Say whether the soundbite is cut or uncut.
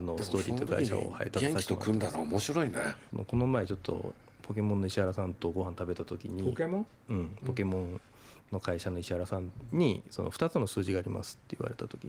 uncut